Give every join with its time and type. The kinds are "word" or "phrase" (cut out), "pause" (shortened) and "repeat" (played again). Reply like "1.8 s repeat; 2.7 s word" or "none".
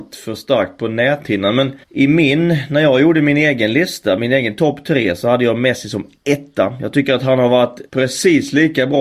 1.8 s pause; 7.9 s pause